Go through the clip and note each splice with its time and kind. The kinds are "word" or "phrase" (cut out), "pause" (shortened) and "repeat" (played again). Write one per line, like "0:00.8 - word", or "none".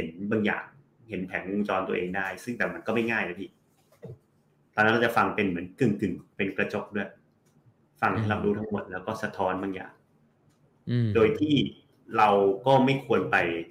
none